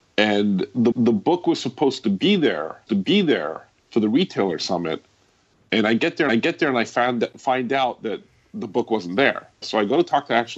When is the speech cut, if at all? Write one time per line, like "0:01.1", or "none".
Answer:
0:00.9
0:02.9
0:06.3
0:09.6

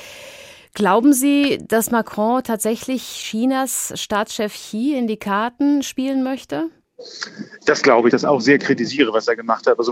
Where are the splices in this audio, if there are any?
0:08.1

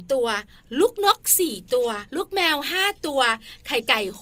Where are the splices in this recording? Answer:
0:02.1

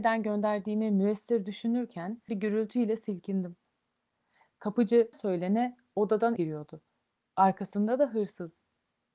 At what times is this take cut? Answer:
0:02.3
0:05.1
0:06.4

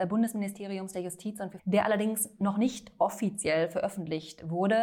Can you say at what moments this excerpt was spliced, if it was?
0:01.6

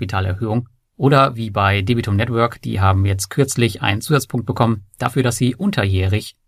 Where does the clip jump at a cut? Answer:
none

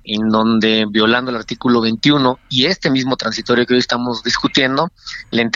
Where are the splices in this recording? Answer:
none

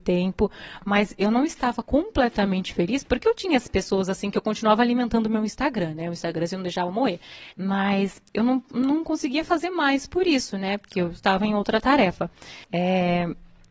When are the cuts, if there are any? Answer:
0:07.5
0:12.6

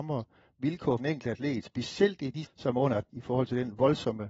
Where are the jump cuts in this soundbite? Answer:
0:01.0
0:02.4
0:03.1

